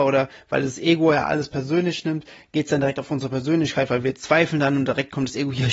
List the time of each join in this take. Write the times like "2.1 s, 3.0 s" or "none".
none